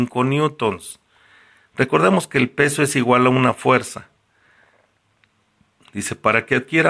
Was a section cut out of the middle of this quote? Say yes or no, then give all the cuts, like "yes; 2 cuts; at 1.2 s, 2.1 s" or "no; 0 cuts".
no; 0 cuts